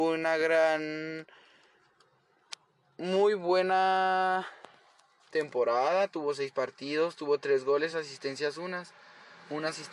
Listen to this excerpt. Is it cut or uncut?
uncut